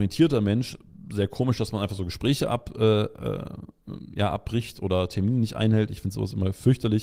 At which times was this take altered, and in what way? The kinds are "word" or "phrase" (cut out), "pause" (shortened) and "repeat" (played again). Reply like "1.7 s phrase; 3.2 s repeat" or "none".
none